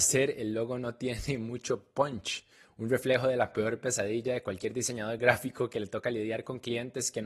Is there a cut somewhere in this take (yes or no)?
no